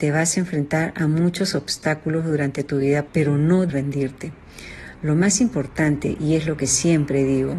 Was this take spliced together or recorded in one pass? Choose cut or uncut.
cut